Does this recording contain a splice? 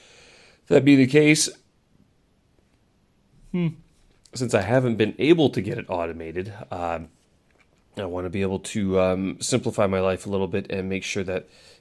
no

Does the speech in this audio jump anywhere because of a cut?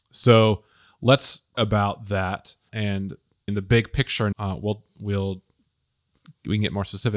yes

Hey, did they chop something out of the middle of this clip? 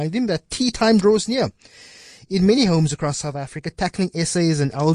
no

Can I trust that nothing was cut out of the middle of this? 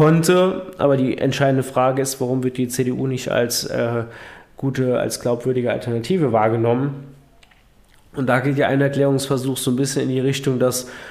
yes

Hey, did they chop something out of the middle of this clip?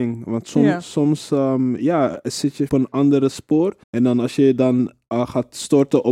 yes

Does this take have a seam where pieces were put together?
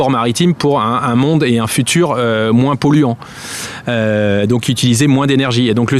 no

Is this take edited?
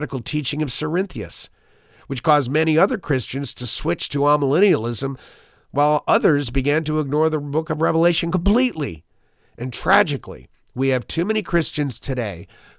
no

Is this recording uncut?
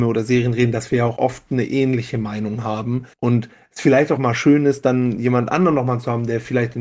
no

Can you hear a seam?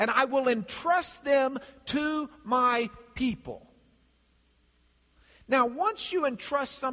no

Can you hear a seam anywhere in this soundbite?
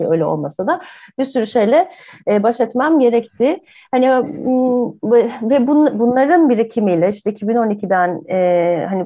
no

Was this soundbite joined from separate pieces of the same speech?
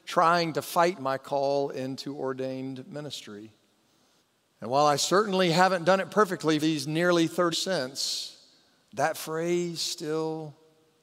yes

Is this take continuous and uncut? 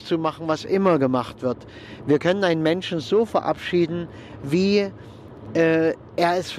yes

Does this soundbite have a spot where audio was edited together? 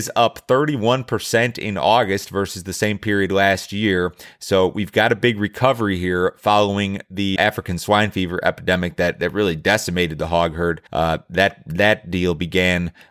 yes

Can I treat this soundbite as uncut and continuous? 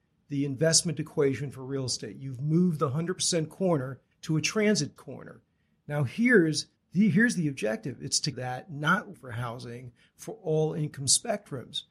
no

